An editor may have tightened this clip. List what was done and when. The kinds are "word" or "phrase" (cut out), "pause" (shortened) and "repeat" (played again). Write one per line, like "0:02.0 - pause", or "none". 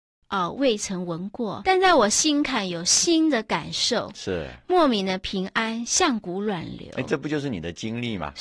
0:01.6 - word

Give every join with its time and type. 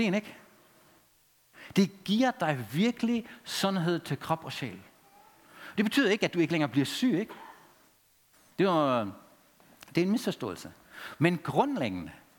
none

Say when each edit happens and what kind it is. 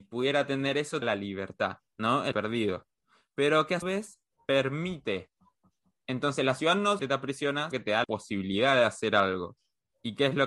0:01.0 - word
0:02.3 - word
0:03.8 - word
0:07.0 - word
0:07.7 - word
0:08.0 - word

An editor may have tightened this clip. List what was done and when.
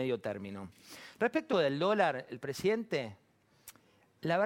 0:01.5 - phrase

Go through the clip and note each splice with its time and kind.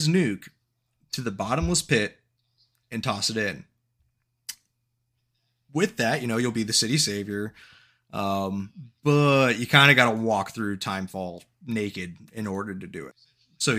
none

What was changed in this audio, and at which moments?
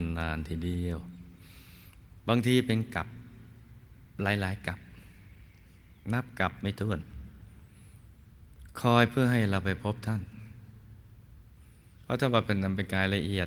0:11.9 - pause

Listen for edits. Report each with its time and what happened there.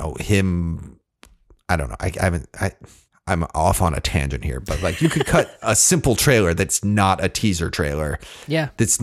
none

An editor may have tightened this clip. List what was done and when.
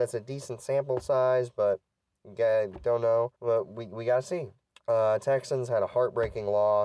0:03.4 - pause
0:04.6 - pause

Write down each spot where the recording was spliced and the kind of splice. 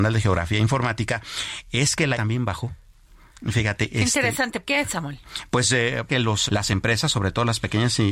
0:02.1 - word
0:04.7 - word
0:06.1 - word
0:06.5 - word

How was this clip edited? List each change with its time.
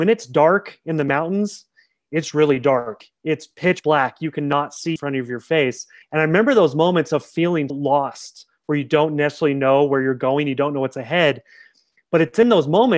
0:05.0 - phrase
0:06.0 - pause
0:07.7 - word

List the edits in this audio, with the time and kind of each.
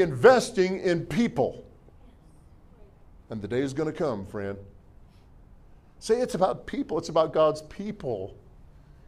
none

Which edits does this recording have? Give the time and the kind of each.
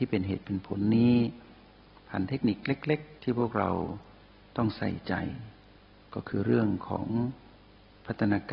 0:03.2 - word

